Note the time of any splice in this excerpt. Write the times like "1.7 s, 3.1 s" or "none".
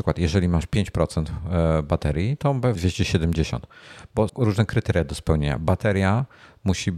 2.8 s, 4.3 s